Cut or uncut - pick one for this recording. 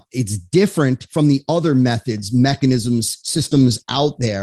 uncut